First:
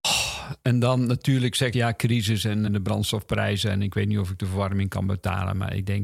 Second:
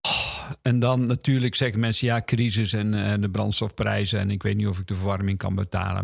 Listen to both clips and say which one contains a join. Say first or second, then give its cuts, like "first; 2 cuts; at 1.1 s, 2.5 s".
first; 2 cuts; at 1.7 s, 2.7 s